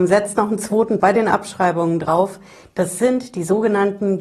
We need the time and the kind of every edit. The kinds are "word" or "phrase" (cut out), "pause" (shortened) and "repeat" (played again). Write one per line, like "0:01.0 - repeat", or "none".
0:01.0 - word